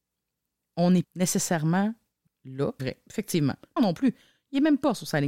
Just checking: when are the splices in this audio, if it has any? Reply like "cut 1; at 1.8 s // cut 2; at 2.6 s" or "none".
cut 1; at 1.0 s // cut 2; at 2.3 s // cut 3; at 2.8 s // cut 4; at 3.8 s